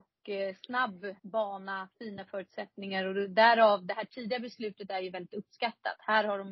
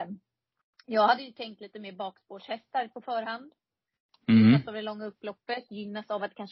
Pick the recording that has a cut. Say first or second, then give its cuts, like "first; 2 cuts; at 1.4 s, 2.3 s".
first; 1 cut; at 1.2 s